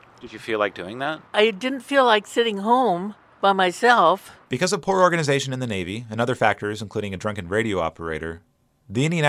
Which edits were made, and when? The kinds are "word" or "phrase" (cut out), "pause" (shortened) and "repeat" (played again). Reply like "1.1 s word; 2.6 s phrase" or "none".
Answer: 1.3 s pause; 3.3 s pause; 4.4 s pause